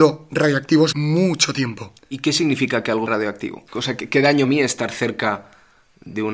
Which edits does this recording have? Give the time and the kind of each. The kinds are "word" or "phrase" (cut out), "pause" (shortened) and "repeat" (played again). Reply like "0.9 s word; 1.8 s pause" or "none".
0.9 s word; 2.0 s pause; 3.1 s word; 3.7 s pause; 4.4 s phrase